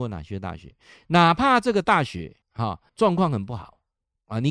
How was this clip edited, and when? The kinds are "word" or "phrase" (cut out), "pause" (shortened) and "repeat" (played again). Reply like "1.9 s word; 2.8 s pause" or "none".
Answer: 2.4 s pause; 2.9 s pause